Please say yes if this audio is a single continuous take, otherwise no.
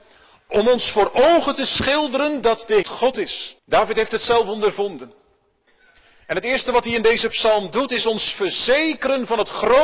no